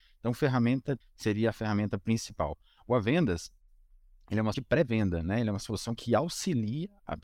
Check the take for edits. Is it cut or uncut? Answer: cut